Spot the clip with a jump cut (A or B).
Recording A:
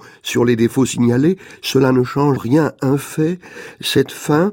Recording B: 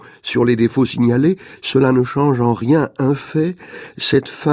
A